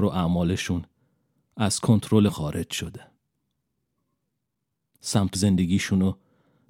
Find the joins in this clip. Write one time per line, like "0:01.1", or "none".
0:02.3
0:05.3